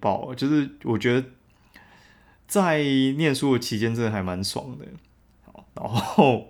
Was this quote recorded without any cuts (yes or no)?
yes